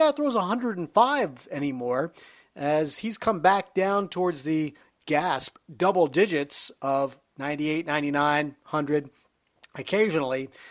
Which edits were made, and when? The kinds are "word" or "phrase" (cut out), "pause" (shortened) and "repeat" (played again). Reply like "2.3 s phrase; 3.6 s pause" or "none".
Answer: none